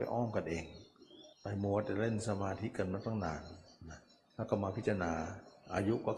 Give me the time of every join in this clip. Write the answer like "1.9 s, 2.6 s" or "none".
1.3 s